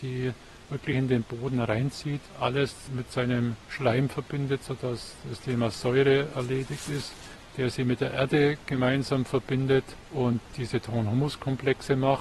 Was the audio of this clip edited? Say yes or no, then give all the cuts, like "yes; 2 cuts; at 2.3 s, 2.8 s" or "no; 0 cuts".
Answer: no; 0 cuts